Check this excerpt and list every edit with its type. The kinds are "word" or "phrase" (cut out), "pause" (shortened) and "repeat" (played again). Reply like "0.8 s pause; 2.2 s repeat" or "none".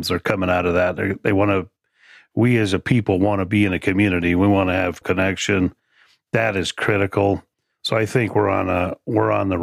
5.0 s word